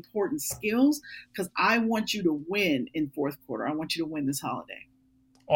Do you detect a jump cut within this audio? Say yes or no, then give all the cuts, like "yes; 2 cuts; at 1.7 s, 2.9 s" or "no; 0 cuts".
no; 0 cuts